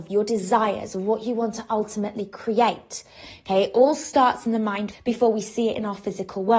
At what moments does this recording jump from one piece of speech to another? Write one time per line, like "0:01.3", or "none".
0:04.9